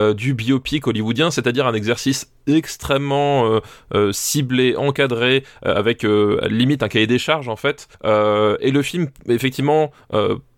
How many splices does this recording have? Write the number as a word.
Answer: one